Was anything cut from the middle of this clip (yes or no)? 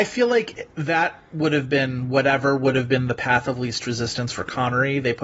no